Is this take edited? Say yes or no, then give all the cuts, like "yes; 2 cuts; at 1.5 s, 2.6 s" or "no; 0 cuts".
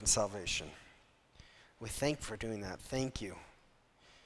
yes; 1 cut; at 2.2 s